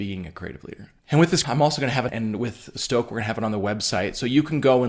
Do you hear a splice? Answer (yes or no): yes